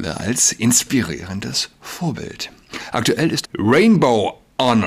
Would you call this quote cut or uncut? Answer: cut